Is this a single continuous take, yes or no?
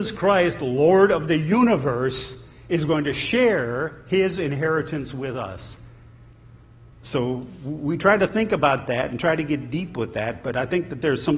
no